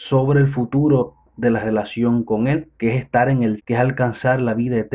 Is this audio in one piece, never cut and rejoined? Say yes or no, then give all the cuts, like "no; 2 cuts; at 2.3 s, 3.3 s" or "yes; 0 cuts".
no; 2 cuts; at 2.7 s, 3.6 s